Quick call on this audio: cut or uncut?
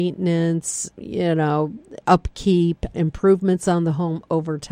cut